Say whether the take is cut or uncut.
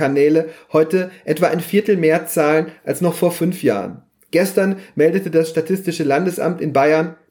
uncut